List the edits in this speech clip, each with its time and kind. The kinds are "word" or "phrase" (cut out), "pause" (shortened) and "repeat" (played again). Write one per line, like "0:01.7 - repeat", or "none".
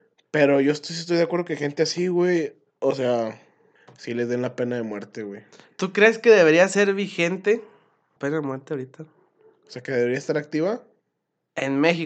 0:03.8 - pause
0:08.2 - word